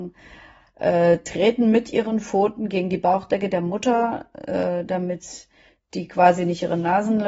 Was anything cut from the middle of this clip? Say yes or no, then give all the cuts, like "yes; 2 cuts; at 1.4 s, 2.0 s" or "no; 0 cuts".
no; 0 cuts